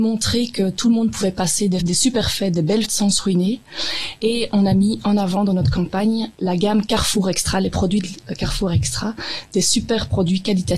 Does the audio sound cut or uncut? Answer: cut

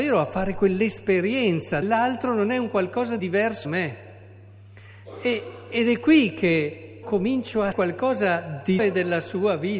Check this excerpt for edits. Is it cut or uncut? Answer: cut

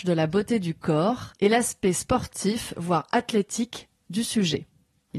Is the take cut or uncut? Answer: cut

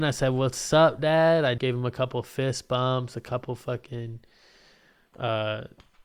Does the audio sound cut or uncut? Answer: cut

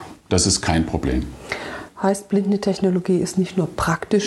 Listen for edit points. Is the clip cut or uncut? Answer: uncut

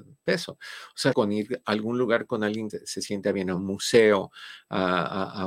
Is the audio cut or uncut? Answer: cut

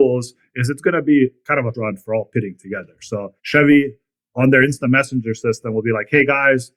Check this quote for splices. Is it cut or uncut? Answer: cut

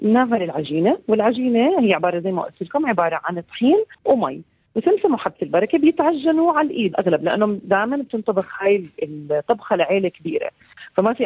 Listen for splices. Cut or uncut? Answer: cut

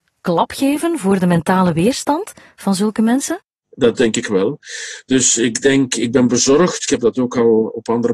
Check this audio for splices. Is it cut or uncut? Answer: uncut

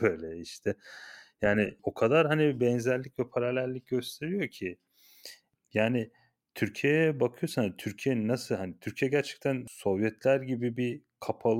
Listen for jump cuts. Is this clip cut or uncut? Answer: uncut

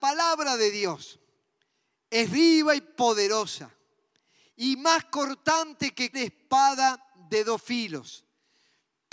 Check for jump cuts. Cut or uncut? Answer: cut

